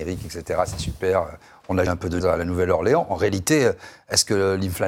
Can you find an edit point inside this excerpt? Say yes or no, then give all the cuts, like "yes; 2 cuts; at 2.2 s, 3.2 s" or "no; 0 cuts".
yes; 2 cuts; at 1.9 s, 2.2 s